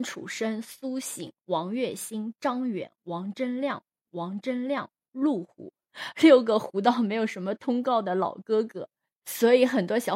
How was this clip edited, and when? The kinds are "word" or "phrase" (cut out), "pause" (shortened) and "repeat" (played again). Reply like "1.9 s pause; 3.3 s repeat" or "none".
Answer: 4.0 s repeat